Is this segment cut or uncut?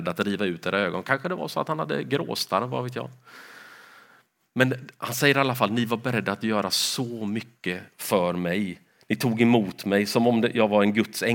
uncut